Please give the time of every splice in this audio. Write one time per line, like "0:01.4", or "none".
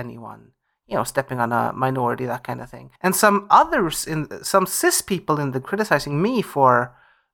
0:03.0
0:05.6